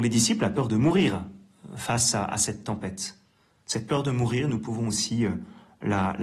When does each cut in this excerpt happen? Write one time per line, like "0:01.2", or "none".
none